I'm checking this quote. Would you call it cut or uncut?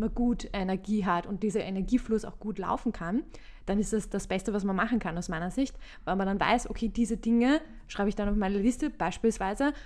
uncut